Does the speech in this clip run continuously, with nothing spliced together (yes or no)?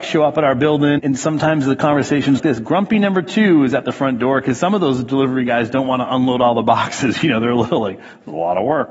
no